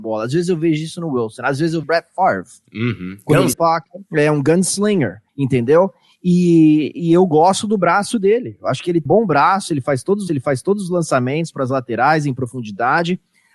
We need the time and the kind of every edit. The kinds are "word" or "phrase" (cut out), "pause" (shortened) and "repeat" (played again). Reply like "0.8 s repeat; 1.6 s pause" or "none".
1.8 s word; 3.5 s phrase; 4.1 s pause; 5.3 s pause; 9.1 s word; 10.3 s repeat